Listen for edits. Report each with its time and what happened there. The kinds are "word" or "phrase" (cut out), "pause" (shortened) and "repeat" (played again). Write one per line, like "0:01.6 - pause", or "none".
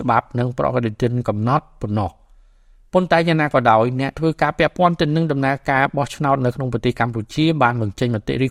none